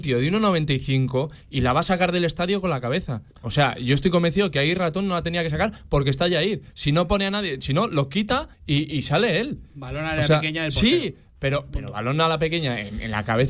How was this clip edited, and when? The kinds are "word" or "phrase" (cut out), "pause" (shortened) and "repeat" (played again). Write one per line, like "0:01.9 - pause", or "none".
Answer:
0:03.3 - pause
0:08.5 - pause